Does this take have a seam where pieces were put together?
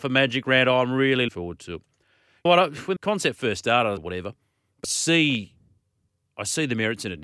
yes; 5 cuts; at 1.3 s, 2.5 s, 3.0 s, 4.0 s, 4.8 s

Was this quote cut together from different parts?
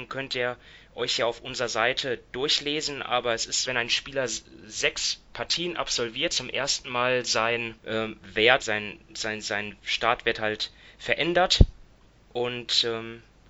yes; 5 cuts; at 3.6 s, 6.3 s, 7.8 s, 8.6 s, 9.1 s

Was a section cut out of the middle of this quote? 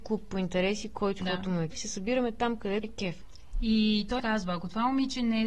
yes; 4 cuts; at 1.2 s, 1.7 s, 2.8 s, 4.2 s

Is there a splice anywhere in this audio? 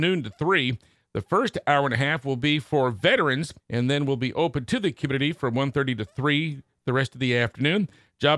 yes; 1 cut; at 3.6 s

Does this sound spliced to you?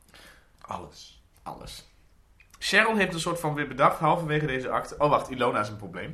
yes; 1 cut; at 1.3 s

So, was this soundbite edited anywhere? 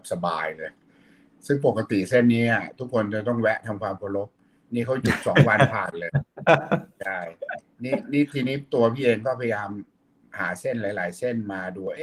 no; 0 cuts

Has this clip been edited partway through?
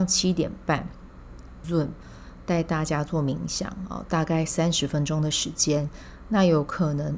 yes; 1 cut; at 1.6 s

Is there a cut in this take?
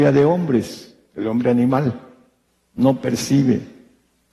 no; 0 cuts

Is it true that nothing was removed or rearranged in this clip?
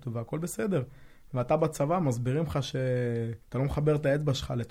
no; 1 cut; at 3.4 s

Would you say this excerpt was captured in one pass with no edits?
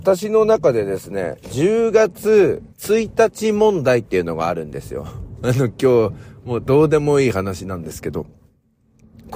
no; 1 cut; at 2.7 s

